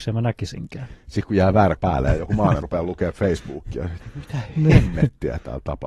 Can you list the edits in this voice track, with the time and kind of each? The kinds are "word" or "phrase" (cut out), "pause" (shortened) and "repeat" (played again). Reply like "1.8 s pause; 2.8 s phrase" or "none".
1.8 s word; 2.6 s word